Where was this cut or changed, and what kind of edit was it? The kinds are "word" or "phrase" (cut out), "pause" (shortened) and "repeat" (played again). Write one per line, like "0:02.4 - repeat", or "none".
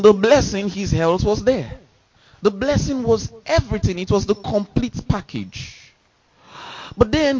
0:02.2 - pause